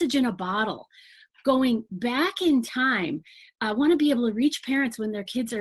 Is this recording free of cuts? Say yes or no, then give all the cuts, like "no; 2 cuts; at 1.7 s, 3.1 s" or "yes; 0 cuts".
yes; 0 cuts